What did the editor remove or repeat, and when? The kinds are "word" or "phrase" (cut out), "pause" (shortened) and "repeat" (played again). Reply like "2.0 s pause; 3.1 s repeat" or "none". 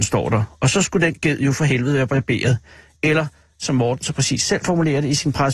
none